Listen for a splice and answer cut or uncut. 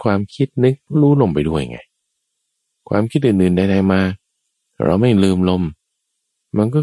uncut